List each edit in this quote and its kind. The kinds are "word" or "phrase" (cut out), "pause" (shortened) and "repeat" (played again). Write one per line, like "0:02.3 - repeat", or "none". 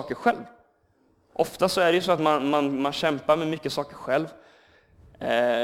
none

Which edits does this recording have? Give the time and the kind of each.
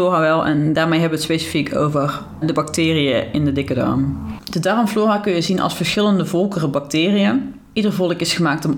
0:02.4 - word

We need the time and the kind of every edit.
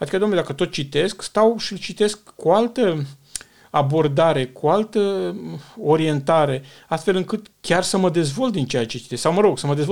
0:07.5 - pause

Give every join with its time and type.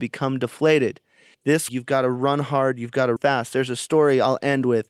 0:01.3 - word
0:01.7 - word
0:03.2 - word

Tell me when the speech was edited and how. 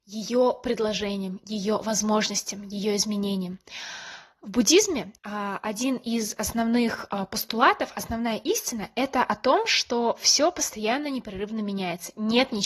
0:05.2 - pause

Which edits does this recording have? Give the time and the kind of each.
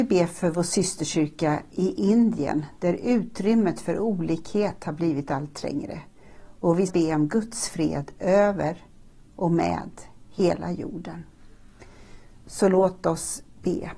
0:06.9 - word

